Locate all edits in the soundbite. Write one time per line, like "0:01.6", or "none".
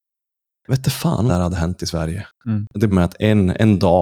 0:01.3
0:02.9